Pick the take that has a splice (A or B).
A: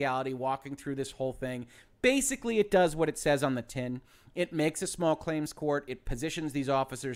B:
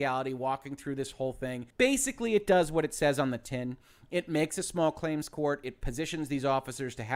B